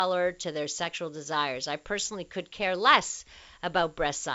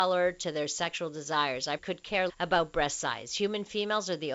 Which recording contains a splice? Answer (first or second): second